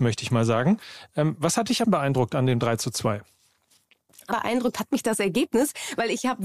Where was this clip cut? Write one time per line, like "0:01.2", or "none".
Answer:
0:01.8
0:04.3
0:05.0